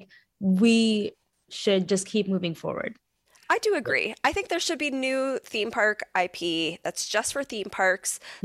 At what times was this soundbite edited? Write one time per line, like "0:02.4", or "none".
none